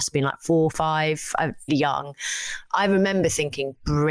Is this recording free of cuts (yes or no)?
no